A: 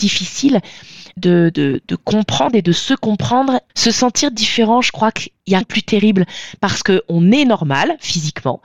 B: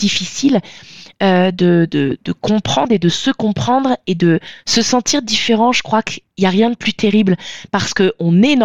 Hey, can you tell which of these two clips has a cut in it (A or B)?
A